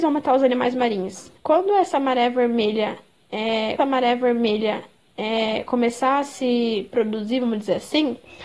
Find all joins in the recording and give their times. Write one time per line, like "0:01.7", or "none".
0:01.4
0:03.8

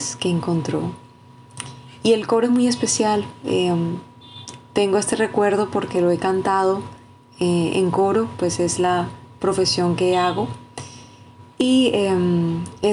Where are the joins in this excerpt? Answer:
none

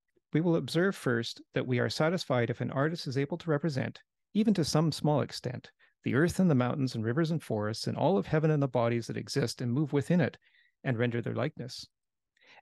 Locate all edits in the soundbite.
none

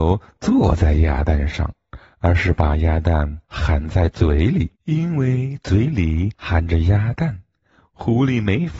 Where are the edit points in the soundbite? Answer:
0:03.4
0:04.8
0:06.3

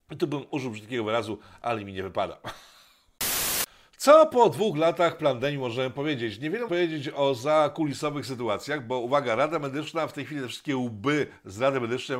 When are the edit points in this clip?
0:06.7

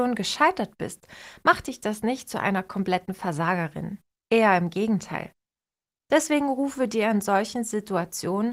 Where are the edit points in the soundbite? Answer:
none

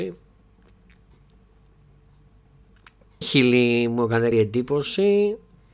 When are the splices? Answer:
0:03.2
0:04.3

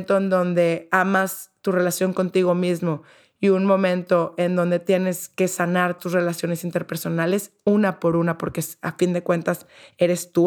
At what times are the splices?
0:06.0

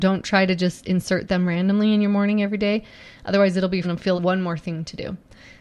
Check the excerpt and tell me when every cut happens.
0:03.8
0:04.2

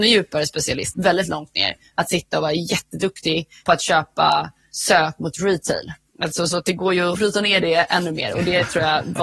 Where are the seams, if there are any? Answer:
0:00.9
0:07.1

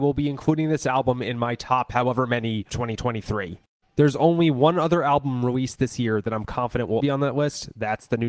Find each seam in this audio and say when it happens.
0:02.7
0:07.0

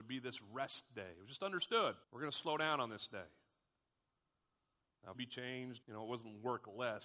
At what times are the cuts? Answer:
0:02.0
0:05.1
0:05.8

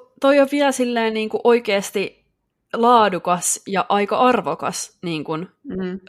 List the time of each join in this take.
none

